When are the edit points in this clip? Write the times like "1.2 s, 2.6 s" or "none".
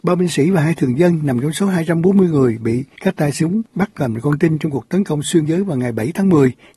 3.7 s, 5.5 s